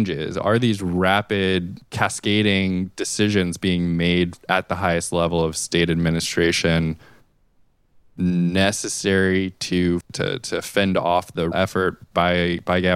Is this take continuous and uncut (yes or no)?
no